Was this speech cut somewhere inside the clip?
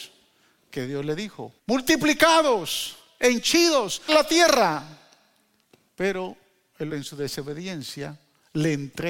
yes; 4 cuts; at 1.6 s, 4.1 s, 5.6 s, 6.9 s

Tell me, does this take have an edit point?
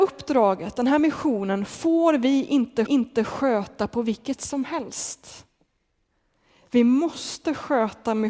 yes; 2 cuts; at 2.9 s, 4.4 s

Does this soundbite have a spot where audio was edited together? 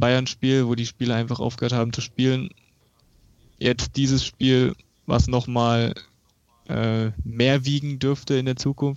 no; 0 cuts

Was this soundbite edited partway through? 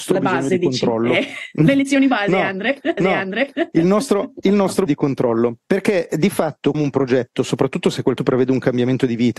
yes; 5 cuts; at 3.0 s, 4.9 s, 5.6 s, 6.7 s, 8.2 s

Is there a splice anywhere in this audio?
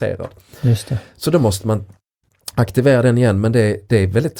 no; 0 cuts

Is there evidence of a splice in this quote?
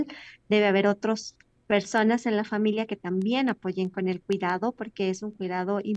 no; 0 cuts

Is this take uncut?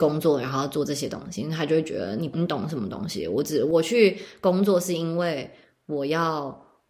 yes; 0 cuts

